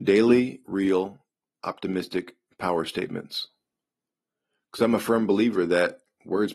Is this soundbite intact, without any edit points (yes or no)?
yes